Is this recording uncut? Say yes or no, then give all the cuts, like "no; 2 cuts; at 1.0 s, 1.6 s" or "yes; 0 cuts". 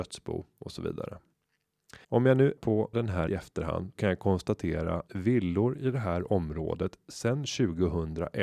no; 6 cuts; at 2.0 s, 2.6 s, 2.9 s, 3.3 s, 4.0 s, 5.1 s